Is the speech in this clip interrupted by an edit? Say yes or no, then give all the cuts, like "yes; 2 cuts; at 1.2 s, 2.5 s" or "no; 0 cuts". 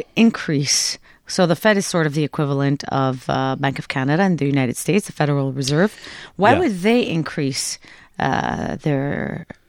no; 0 cuts